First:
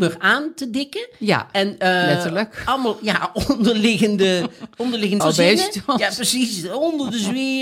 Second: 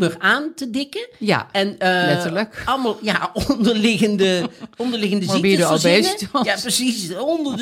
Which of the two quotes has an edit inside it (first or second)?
first